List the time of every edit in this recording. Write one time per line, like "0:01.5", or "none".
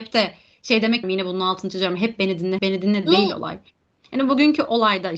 0:01.0
0:02.6